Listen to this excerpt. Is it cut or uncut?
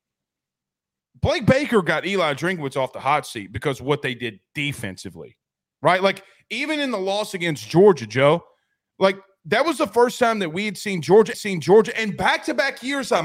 cut